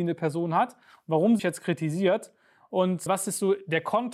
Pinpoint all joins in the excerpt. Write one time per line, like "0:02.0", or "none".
0:01.4
0:03.1